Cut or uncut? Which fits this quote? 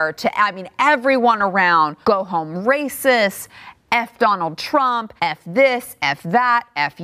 cut